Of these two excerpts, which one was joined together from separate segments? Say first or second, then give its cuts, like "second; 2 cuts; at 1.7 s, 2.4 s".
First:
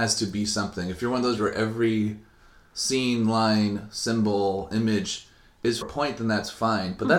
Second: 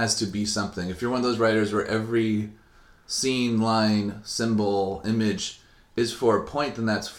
first; 2 cuts; at 1.4 s, 5.8 s